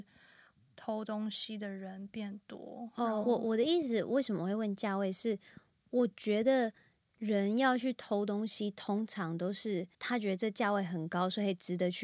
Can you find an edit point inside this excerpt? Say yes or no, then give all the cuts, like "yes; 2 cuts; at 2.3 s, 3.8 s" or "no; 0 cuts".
yes; 2 cuts; at 3.2 s, 9.9 s